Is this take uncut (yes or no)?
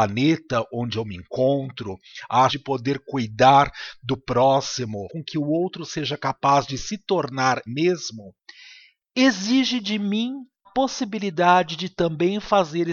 no